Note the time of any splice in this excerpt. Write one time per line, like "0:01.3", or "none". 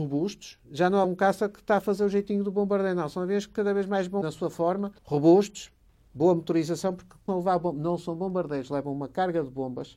0:01.0
0:04.2
0:05.0
0:07.3